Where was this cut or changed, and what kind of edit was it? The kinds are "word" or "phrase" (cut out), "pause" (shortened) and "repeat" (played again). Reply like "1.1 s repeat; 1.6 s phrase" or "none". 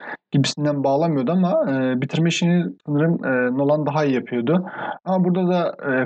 2.8 s pause

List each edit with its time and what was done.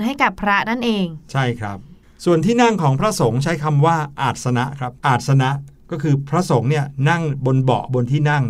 5.0 s pause

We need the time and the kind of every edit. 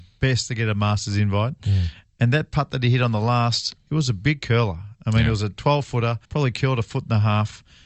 6.2 s pause

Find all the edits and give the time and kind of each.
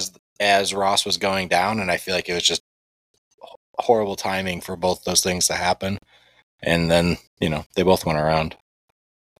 none

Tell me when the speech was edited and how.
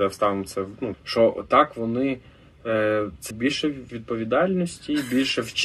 0.9 s word; 3.3 s word; 3.9 s word

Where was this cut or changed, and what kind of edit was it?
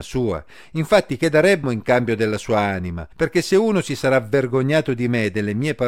1.6 s word; 3.1 s pause

